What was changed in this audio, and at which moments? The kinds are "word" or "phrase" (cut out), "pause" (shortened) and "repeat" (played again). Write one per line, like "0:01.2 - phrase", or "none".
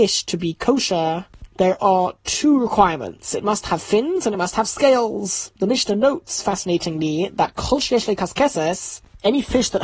none